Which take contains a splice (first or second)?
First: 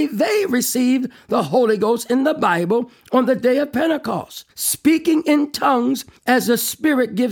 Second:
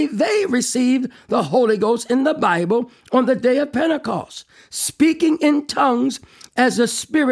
first